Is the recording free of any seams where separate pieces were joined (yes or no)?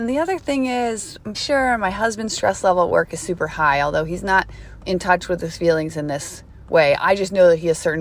no